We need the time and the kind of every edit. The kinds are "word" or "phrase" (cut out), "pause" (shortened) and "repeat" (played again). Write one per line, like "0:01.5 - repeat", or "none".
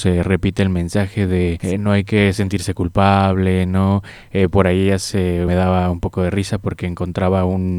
0:01.6 - word
0:05.5 - phrase